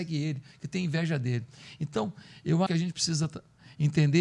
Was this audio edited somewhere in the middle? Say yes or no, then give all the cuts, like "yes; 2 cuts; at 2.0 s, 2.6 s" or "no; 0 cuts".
yes; 1 cut; at 2.7 s